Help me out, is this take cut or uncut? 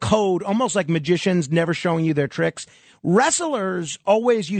uncut